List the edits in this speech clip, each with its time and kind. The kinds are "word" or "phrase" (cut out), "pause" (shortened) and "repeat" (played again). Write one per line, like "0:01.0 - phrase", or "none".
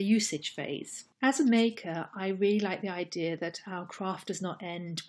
0:01.1 - pause